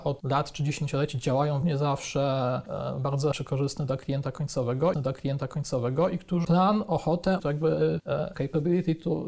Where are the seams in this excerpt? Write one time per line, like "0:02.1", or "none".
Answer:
0:01.6
0:03.3
0:04.9
0:06.4
0:07.4
0:08.3